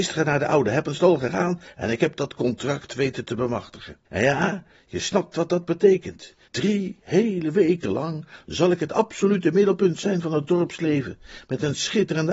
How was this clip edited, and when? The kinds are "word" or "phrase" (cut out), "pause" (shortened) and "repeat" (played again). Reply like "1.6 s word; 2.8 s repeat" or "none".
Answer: 4.0 s pause; 6.4 s pause